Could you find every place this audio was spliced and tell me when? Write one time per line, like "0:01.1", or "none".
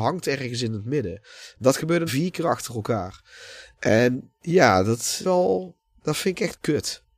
0:02.1
0:04.4
0:05.2